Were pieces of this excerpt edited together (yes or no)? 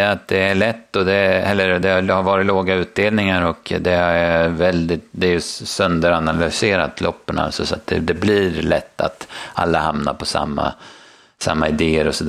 no